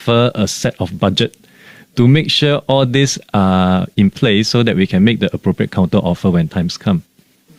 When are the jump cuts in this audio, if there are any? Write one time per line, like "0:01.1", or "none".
none